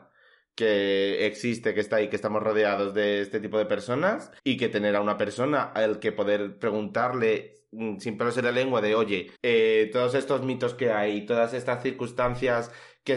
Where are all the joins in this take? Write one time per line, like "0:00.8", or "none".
0:04.4
0:09.3